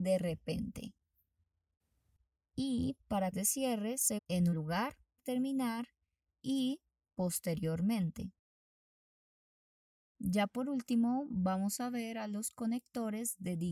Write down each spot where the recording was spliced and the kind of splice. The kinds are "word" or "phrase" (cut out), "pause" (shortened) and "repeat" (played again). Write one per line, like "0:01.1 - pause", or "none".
0:03.3 - word
0:04.2 - word
0:04.5 - word
0:05.2 - word